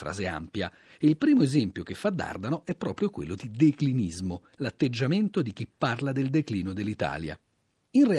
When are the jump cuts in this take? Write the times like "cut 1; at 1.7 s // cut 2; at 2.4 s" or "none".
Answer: cut 1; at 4.5 s